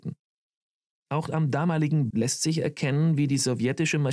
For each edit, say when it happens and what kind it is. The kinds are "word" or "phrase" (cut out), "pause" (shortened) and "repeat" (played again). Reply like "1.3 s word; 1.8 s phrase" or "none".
2.1 s word